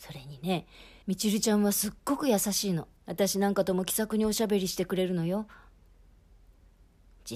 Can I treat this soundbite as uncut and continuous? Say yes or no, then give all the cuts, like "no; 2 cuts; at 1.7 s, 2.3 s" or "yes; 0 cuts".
no; 2 cuts; at 1.0 s, 3.0 s